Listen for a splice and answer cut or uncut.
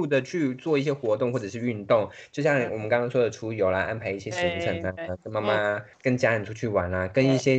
cut